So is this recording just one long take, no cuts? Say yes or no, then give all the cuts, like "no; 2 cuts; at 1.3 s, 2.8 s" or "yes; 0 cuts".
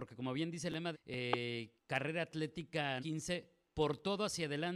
no; 3 cuts; at 0.9 s, 1.8 s, 3.0 s